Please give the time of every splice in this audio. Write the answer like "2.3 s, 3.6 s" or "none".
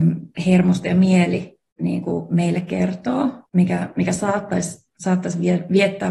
3.5 s